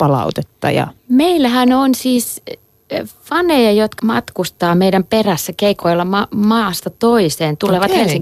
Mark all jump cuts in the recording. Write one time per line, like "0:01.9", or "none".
0:01.0
0:04.0